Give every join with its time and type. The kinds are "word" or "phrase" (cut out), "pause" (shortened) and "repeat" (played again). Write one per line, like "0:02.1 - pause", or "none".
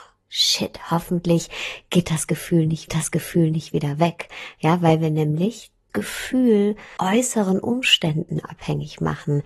0:02.9 - repeat
0:05.9 - word
0:07.0 - word